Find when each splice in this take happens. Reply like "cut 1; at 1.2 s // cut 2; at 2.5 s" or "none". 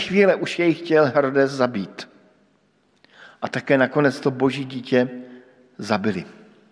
none